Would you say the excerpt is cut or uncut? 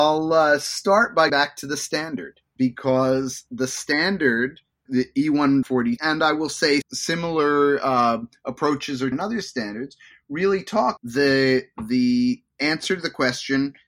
cut